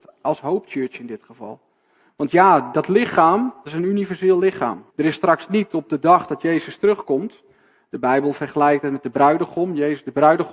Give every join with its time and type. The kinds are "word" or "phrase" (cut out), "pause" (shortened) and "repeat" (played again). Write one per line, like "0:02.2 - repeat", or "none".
0:03.7 - phrase
0:04.9 - pause